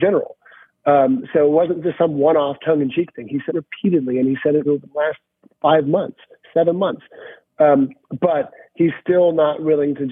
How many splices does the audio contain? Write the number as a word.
three